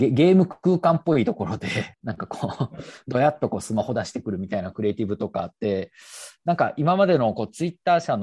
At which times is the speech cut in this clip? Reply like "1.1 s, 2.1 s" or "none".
1.9 s